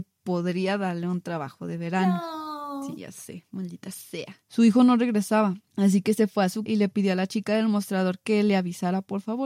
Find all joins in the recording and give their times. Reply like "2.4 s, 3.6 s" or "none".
6.7 s